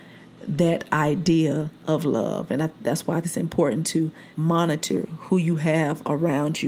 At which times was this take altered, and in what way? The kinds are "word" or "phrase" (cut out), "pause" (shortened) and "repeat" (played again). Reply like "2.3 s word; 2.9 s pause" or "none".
1.8 s pause; 3.2 s word; 4.3 s pause